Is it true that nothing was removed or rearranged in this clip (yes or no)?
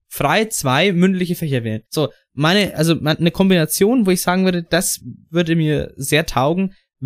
no